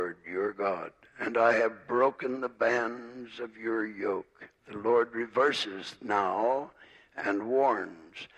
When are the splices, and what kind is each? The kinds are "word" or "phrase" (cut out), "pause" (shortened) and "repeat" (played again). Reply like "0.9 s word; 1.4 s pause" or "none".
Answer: 4.6 s pause